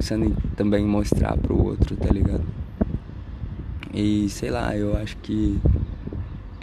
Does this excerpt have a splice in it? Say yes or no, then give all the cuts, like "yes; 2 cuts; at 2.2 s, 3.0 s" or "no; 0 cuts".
no; 0 cuts